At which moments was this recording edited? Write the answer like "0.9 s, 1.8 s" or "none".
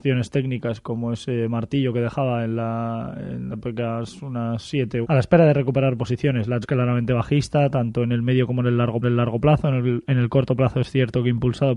3.5 s, 5.0 s, 6.6 s, 9.0 s